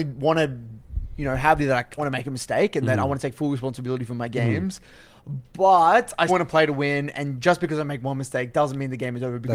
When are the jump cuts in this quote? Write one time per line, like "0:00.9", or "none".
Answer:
0:01.6
0:02.0
0:06.3